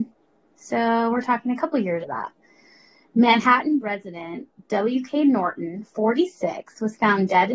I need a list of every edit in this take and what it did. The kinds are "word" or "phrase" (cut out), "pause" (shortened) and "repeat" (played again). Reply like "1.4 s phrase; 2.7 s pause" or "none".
2.0 s word; 3.8 s word